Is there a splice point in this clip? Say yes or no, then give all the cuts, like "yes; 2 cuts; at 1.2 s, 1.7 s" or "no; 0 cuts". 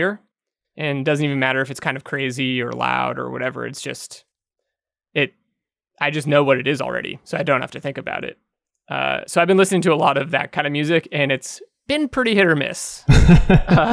no; 0 cuts